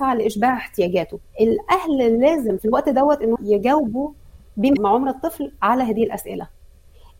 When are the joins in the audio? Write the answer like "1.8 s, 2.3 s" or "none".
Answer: 1.2 s, 2.6 s, 3.4 s, 4.8 s